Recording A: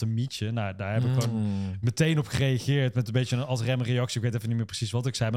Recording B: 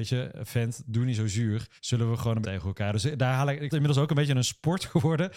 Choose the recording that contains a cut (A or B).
B